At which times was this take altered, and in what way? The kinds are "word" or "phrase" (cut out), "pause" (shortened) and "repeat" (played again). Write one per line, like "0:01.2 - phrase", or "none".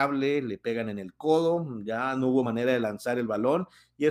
none

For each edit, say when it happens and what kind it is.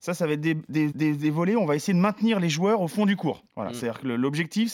0:00.9 - repeat
0:03.5 - pause

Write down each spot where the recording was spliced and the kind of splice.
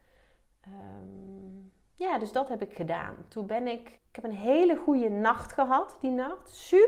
0:04.0 - pause

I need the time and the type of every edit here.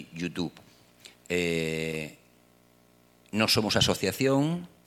0:01.1 - pause

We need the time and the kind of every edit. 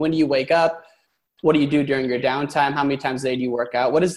none

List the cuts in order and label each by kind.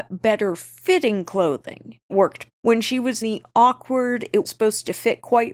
0:02.1 - word
0:02.5 - word
0:03.2 - word
0:04.5 - word

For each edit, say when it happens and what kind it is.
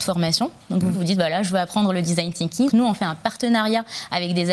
0:00.9 - word
0:02.7 - word

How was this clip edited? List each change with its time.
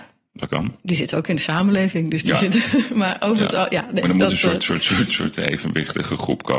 none

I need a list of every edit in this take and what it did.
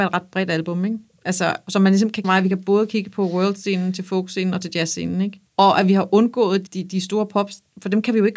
0:02.2 - phrase
0:05.5 - pause
0:06.7 - word

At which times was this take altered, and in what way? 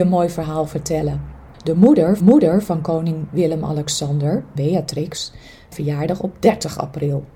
0:01.5 - pause
0:02.2 - repeat
0:04.6 - word
0:05.7 - phrase

